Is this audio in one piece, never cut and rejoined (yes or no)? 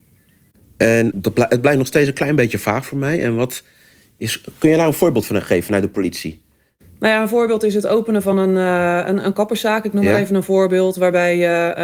yes